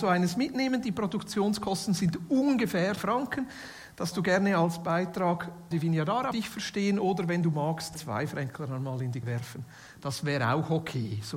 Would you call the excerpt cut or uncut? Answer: cut